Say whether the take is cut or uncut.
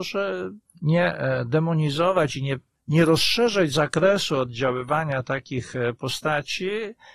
uncut